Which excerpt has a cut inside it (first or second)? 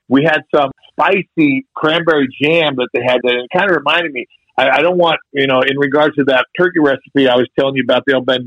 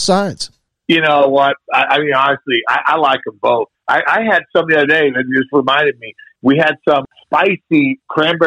first